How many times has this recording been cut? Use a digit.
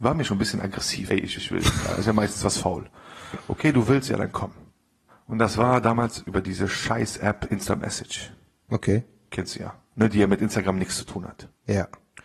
3